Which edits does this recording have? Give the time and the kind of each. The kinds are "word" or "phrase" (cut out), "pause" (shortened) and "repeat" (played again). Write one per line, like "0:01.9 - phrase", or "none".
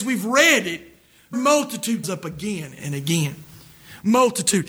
0:01.3 - word
0:02.0 - word
0:02.8 - word